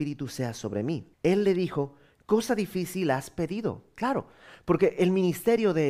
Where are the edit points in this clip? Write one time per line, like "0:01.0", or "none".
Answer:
0:01.1